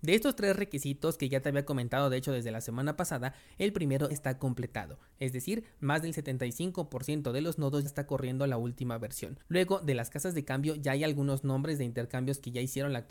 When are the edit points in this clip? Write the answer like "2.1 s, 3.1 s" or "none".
4.1 s, 7.9 s, 9.4 s